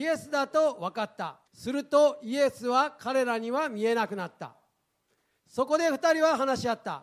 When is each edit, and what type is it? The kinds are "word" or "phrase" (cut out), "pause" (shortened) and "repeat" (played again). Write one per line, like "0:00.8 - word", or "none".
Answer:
0:01.5 - pause